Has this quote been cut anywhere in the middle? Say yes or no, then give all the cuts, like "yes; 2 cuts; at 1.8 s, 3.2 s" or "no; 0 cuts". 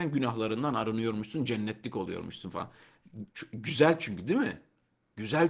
yes; 1 cut; at 3.3 s